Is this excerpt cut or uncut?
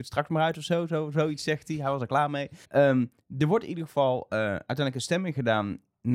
cut